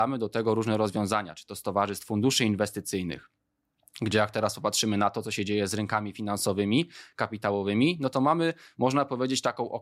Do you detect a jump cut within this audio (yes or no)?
no